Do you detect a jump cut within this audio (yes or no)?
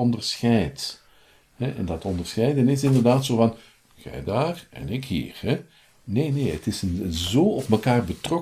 no